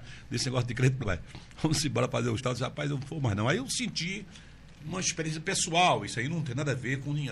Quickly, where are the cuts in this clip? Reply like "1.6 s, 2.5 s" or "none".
1.0 s, 2.4 s, 4.8 s